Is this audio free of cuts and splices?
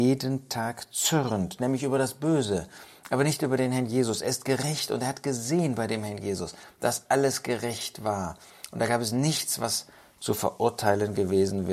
yes; 0 cuts

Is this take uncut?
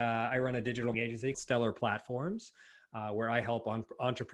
no; 2 cuts; at 0.9 s, 1.3 s

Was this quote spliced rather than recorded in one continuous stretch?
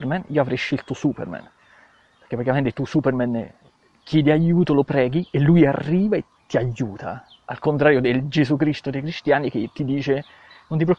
no; 0 cuts

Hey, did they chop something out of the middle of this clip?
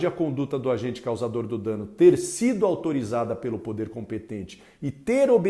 no; 0 cuts

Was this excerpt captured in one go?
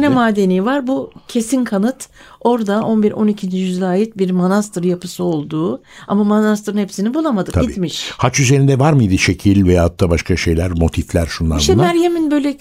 yes; 0 cuts

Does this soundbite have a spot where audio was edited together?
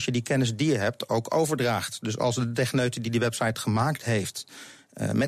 no; 0 cuts

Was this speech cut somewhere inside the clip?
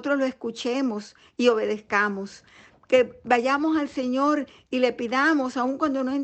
no; 0 cuts

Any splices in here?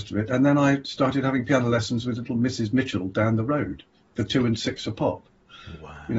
no; 0 cuts

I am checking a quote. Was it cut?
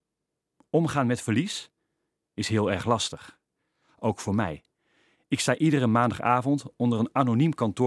no; 0 cuts

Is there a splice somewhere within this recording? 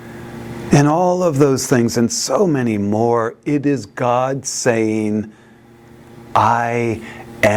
no; 0 cuts

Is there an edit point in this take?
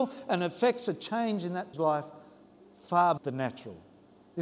yes; 2 cuts; at 1.7 s, 3.2 s

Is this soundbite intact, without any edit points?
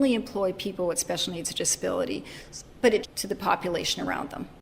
no; 1 cut; at 3.0 s

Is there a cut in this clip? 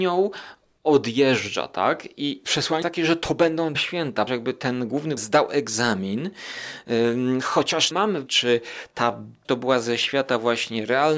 yes; 8 cuts; at 2.4 s, 2.8 s, 3.7 s, 4.3 s, 5.2 s, 7.9 s, 8.3 s, 9.4 s

